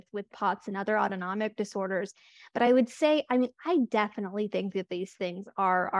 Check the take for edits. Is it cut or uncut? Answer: uncut